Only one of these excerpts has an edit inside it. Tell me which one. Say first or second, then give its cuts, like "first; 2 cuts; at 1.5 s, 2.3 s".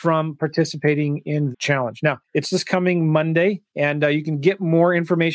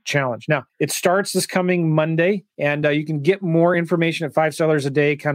first; 2 cuts; at 1.5 s, 2.4 s